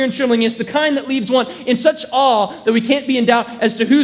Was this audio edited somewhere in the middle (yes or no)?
no